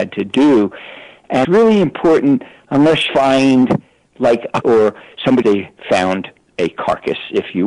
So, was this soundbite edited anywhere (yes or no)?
yes